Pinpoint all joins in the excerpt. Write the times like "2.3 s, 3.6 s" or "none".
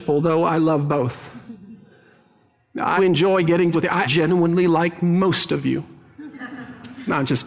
3.0 s, 3.7 s, 4.1 s